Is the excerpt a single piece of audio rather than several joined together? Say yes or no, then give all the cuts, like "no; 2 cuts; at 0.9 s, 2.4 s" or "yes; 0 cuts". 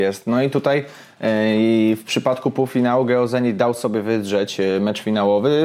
yes; 0 cuts